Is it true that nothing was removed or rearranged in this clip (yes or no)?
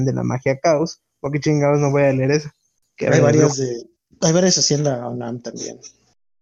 yes